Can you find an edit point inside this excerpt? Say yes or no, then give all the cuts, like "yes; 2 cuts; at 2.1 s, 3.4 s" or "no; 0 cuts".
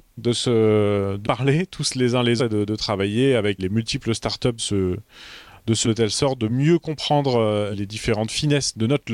yes; 7 cuts; at 1.2 s, 2.4 s, 3.6 s, 4.6 s, 5.8 s, 6.5 s, 7.7 s